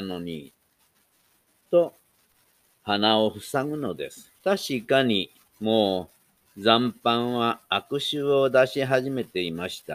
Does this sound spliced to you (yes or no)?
yes